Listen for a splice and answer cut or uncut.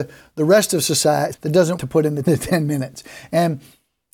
cut